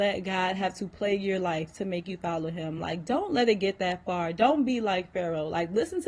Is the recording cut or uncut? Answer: uncut